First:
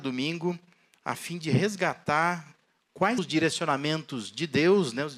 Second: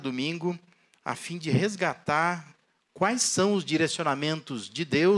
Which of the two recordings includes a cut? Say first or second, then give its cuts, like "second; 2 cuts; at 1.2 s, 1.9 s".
first; 1 cut; at 3.2 s